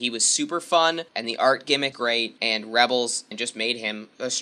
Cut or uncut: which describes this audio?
cut